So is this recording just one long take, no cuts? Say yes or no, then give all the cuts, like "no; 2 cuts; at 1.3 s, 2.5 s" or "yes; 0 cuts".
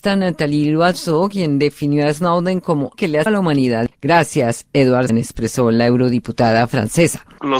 no; 3 cuts; at 2.9 s, 3.3 s, 5.1 s